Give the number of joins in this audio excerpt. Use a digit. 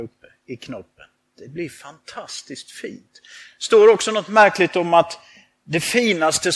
1